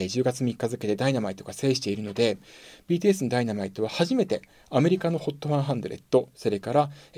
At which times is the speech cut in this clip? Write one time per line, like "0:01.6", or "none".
none